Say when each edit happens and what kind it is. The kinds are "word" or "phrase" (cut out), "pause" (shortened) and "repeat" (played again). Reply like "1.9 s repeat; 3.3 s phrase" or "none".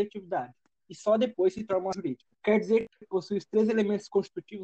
1.9 s word; 2.3 s pause; 3.0 s word